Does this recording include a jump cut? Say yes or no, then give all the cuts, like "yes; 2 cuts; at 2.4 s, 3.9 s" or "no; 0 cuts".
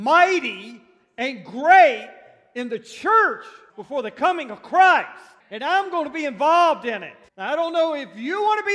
yes; 3 cuts; at 3.7 s, 5.4 s, 7.3 s